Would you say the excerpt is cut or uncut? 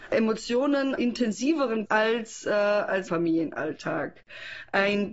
cut